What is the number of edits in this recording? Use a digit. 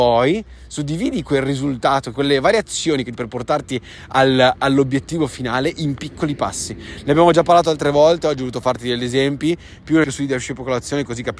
3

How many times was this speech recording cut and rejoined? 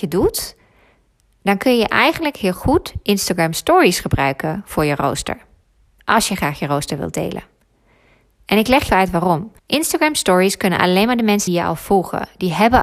3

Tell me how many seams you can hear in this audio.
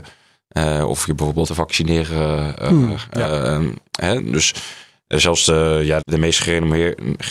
2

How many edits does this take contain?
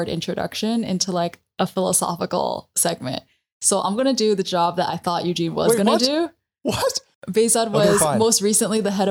0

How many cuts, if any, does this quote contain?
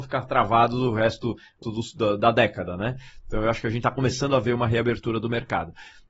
2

